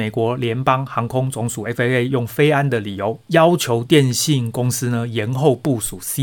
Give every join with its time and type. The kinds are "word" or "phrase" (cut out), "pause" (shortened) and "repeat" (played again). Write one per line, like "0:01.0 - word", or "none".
none